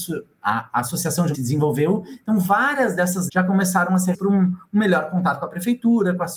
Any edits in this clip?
yes; 3 cuts; at 1.3 s, 3.3 s, 4.1 s

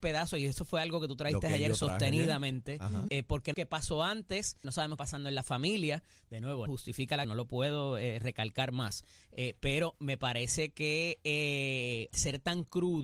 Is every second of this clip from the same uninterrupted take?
no; 7 cuts; at 3.1 s, 3.5 s, 4.6 s, 5.0 s, 6.7 s, 7.2 s, 12.1 s

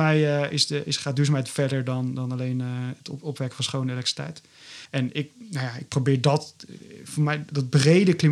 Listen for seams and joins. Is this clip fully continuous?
no; 1 cut; at 4.9 s

